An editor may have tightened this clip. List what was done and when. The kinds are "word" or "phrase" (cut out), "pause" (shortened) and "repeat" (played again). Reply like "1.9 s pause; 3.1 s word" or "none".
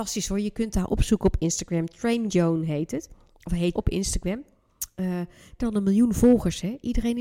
2.3 s word; 3.7 s word; 5.6 s word